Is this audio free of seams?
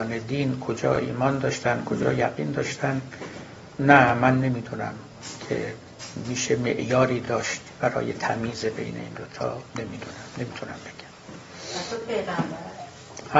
no; 1 cut; at 9.7 s

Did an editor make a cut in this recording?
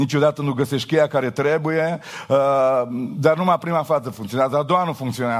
no; 0 cuts

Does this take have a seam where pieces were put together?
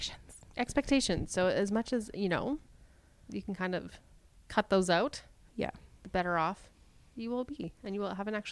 no; 0 cuts

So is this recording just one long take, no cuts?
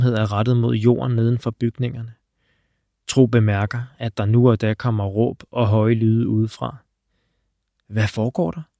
yes; 0 cuts

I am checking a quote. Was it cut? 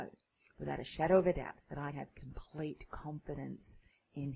yes; 2 cuts; at 1.6 s, 1.9 s

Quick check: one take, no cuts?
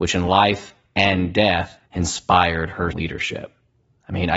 no; 2 cuts; at 1.8 s, 2.9 s

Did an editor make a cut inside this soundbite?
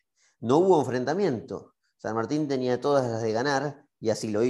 no; 0 cuts

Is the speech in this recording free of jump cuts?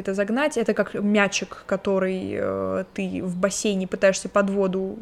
yes; 0 cuts

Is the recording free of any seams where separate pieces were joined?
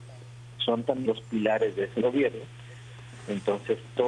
no; 1 cut; at 1.1 s

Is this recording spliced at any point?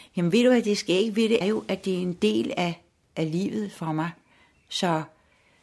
yes; 1 cut; at 1.4 s

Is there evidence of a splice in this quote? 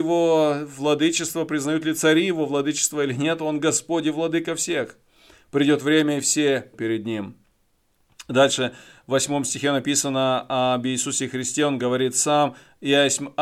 yes; 1 cut; at 6.7 s

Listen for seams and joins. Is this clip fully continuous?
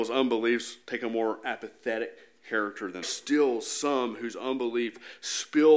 no; 1 cut; at 3.0 s

